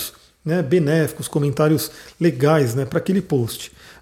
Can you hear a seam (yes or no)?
no